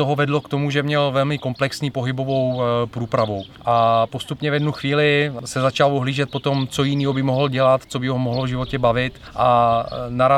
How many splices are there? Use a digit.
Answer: 0